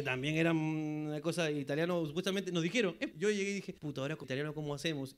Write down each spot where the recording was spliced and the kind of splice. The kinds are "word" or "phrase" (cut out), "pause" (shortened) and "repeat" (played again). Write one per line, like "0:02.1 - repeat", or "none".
0:03.1 - word
0:03.8 - pause
0:04.2 - word